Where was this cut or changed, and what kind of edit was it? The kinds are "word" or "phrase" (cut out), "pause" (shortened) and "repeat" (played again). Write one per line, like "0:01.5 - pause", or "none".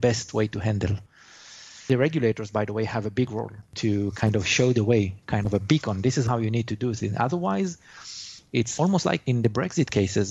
0:03.6 - pause